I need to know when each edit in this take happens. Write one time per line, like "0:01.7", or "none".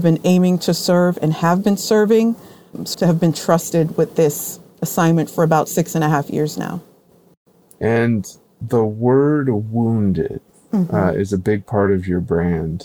0:02.9